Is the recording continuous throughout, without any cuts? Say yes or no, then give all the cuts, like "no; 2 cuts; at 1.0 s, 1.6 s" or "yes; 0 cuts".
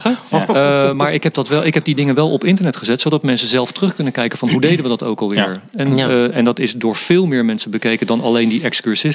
yes; 0 cuts